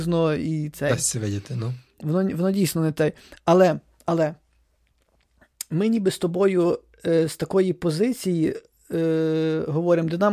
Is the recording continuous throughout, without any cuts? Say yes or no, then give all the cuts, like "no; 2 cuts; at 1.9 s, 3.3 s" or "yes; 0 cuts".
yes; 0 cuts